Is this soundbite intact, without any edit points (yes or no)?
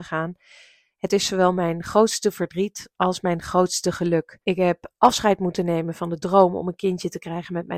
no